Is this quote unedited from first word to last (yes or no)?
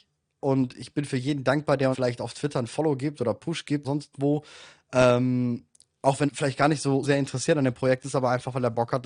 no